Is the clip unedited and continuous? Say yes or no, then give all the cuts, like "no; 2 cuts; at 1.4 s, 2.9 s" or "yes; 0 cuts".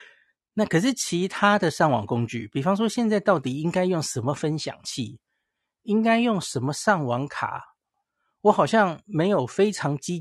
yes; 0 cuts